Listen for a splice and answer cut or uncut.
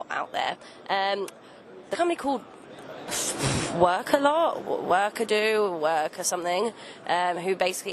cut